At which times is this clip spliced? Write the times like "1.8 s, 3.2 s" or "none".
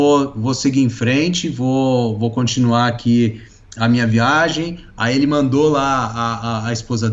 none